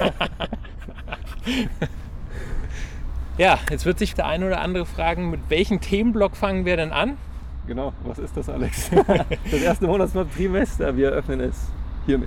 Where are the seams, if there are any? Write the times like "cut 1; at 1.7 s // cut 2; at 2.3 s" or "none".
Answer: cut 1; at 4.1 s